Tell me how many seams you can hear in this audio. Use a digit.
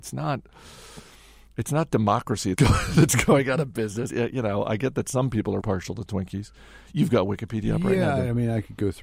3